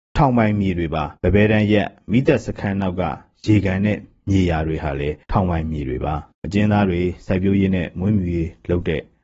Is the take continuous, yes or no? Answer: no